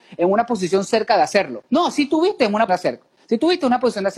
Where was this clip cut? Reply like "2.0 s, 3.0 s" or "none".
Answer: 1.7 s, 2.7 s